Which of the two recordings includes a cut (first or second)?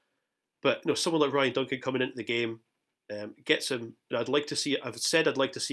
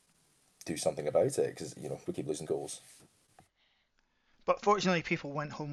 second